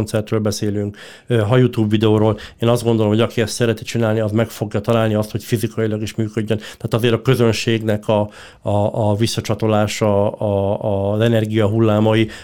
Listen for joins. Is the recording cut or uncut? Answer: uncut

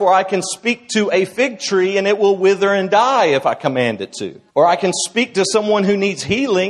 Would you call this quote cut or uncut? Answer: cut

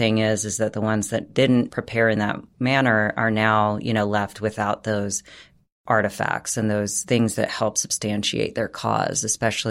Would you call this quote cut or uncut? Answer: uncut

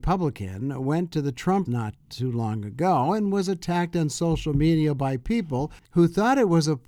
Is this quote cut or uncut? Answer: cut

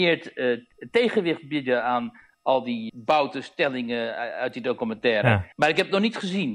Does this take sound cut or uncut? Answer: cut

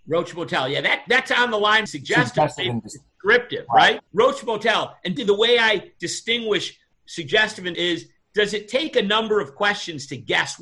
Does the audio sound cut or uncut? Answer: cut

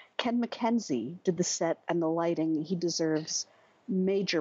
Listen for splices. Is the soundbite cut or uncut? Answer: uncut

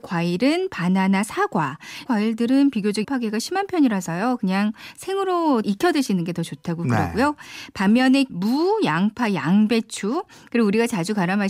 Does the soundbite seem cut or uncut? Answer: cut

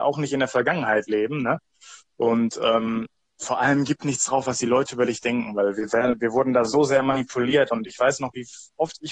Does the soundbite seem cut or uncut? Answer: uncut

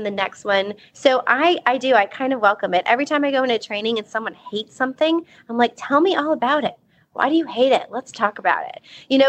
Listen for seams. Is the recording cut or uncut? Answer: uncut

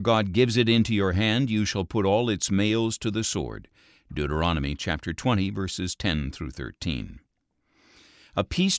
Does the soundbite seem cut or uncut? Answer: uncut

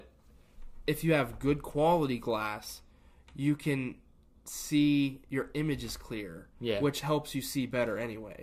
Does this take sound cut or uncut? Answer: uncut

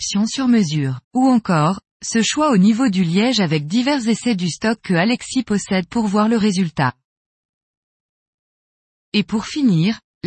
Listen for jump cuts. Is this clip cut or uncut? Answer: cut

